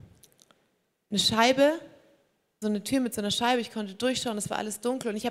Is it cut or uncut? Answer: cut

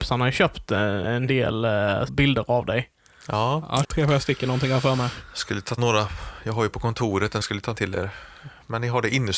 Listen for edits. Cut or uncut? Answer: cut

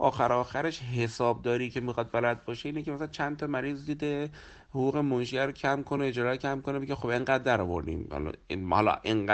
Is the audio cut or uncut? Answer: uncut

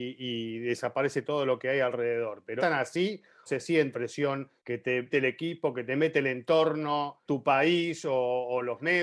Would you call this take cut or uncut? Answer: cut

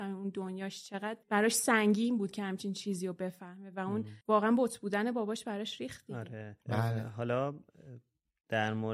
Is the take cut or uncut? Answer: cut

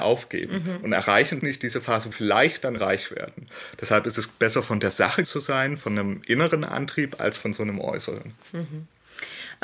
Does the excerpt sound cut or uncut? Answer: cut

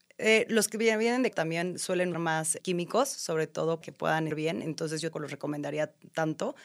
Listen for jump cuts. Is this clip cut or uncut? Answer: cut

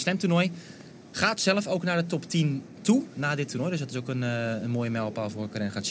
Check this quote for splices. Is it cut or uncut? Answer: uncut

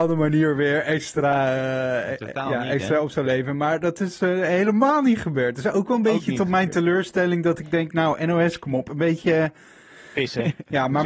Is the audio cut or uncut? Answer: uncut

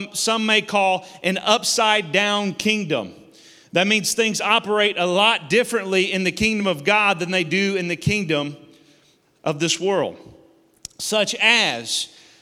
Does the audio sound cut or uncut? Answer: uncut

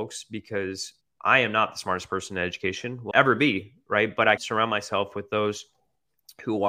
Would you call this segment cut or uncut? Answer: cut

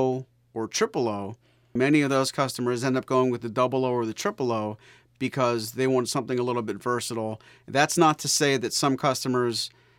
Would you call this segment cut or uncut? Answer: uncut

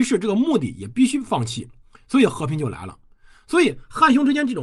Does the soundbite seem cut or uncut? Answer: uncut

